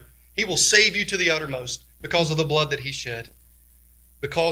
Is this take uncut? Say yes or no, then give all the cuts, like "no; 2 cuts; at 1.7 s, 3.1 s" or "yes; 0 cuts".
no; 1 cut; at 1.9 s